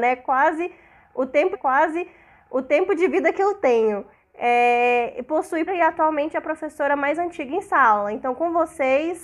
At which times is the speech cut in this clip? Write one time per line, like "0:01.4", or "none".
0:01.5
0:04.1
0:05.7